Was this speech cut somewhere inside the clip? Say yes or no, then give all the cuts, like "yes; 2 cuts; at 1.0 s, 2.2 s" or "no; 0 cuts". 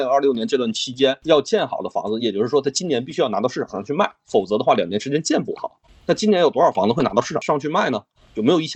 no; 0 cuts